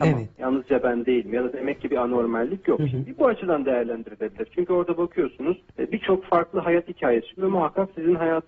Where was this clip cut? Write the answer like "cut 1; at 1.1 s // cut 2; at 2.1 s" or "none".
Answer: cut 1; at 1.9 s // cut 2; at 5.7 s // cut 3; at 7.4 s